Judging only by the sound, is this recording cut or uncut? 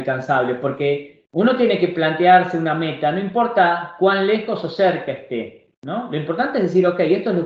cut